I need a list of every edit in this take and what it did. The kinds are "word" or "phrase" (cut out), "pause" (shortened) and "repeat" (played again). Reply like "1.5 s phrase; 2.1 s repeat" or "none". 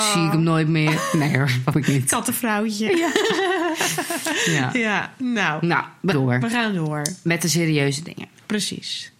1.7 s word; 6.1 s word